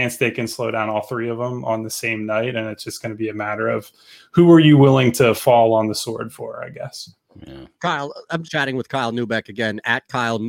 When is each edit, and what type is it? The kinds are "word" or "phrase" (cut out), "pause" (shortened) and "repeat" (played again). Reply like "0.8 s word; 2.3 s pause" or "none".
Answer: 8.4 s phrase